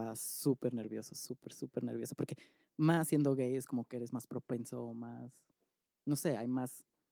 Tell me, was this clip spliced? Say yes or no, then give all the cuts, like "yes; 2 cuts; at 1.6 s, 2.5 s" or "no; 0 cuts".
no; 0 cuts